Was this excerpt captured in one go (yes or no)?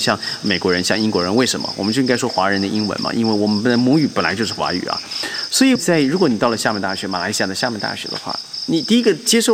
no